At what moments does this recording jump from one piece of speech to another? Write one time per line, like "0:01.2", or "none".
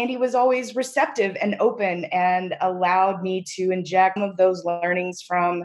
0:04.2